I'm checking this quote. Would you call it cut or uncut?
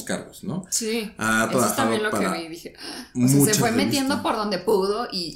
uncut